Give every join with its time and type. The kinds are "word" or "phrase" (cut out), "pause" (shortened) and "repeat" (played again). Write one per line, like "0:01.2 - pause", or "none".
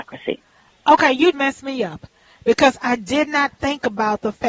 0:01.3 - word
0:03.6 - word